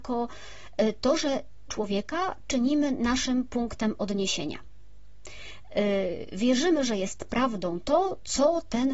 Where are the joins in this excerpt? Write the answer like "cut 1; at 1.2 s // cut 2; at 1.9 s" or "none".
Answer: cut 1; at 1.7 s